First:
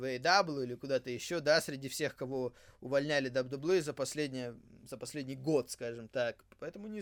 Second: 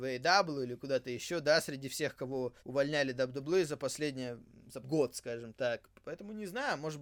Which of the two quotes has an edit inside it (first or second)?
second